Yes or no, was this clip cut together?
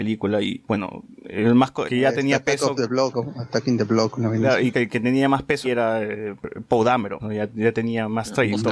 yes